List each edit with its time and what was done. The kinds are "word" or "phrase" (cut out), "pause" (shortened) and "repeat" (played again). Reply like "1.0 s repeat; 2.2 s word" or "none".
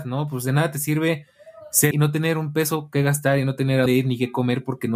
1.9 s word; 3.9 s word

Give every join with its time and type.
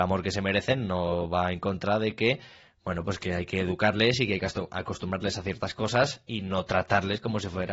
none

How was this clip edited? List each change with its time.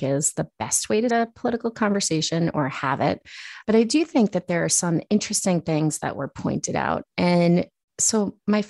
1.1 s word; 3.6 s pause; 7.1 s pause

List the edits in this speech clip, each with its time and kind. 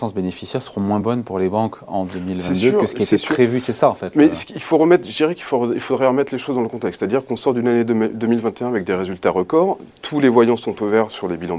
none

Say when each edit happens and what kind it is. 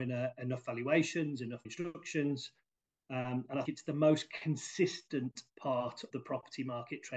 1.6 s word; 3.6 s word; 6.1 s word

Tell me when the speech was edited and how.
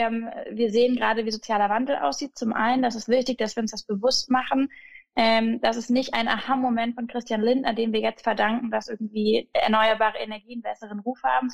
none

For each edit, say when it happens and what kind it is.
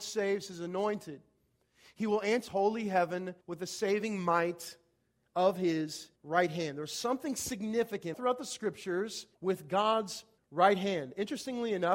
2.5 s phrase; 3.4 s pause; 6.2 s pause; 8.1 s word; 9.3 s pause; 10.4 s pause

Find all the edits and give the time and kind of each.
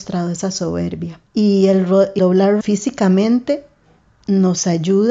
1.3 s pause; 2.2 s word; 2.6 s word

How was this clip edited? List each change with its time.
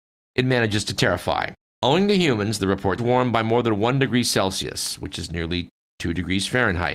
1.6 s pause; 3.0 s phrase

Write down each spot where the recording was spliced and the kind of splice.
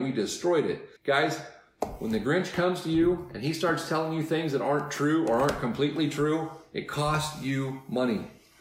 1.0 s pause

